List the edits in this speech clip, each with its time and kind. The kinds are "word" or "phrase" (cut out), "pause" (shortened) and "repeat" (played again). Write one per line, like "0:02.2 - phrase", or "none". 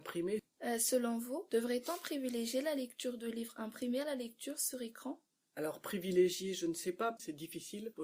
none